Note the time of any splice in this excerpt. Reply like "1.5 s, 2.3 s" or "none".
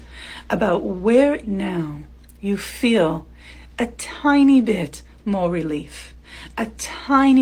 1.4 s